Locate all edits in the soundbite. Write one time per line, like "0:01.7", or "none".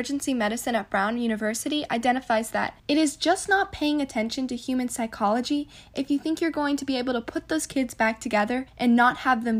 0:02.8
0:08.7